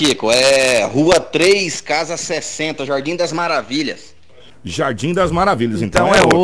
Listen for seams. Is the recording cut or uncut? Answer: uncut